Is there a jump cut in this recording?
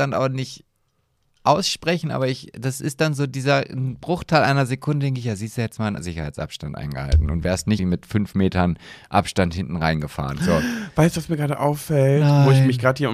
yes; 1 cut; at 7.8 s

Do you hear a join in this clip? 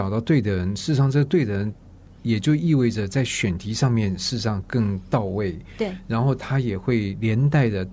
yes; 1 cut; at 2.0 s

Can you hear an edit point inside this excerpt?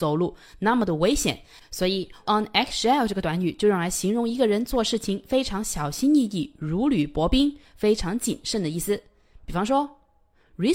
yes; 1 cut; at 2.3 s

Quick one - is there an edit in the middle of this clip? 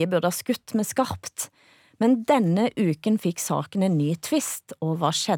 no; 0 cuts

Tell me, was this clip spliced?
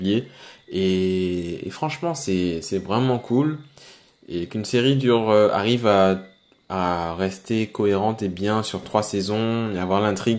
no; 0 cuts

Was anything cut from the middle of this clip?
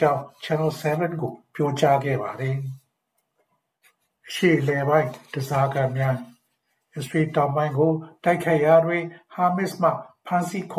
no; 0 cuts

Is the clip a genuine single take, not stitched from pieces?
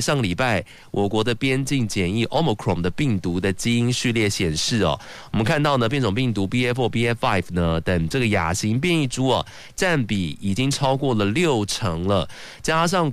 yes; 0 cuts

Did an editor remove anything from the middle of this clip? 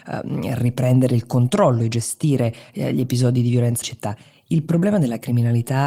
yes; 1 cut; at 3.8 s

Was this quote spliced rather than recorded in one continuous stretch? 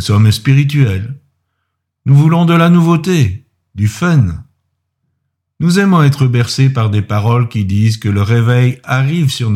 no; 0 cuts

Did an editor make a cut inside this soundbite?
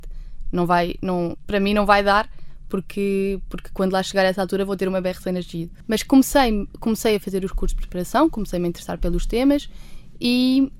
no; 0 cuts

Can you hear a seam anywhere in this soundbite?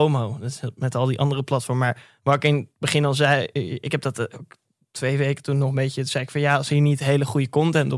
no; 0 cuts

